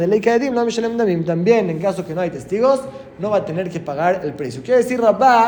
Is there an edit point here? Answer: no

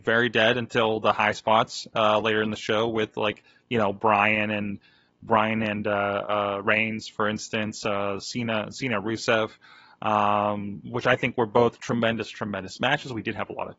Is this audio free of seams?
yes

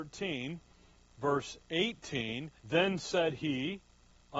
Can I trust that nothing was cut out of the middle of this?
no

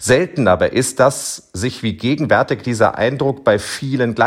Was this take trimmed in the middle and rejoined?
no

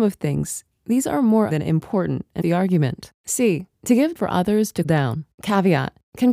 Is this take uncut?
no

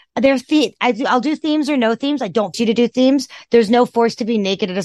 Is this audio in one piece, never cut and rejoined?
no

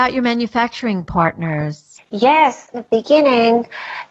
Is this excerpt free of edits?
no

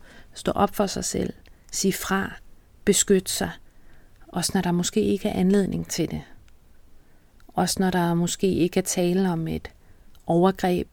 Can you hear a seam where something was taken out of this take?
no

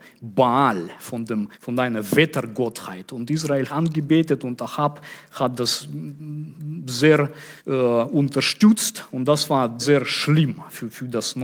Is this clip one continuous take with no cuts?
no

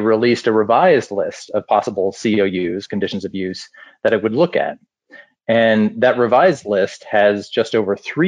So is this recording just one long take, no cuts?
yes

